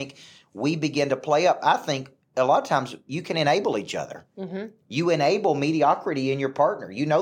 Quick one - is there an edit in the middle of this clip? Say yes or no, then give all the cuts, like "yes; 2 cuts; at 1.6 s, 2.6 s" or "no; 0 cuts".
no; 0 cuts